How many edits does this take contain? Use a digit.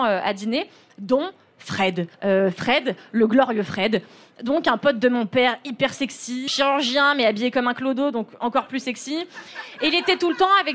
2